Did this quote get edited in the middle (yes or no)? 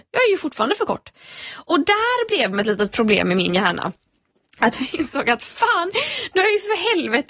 yes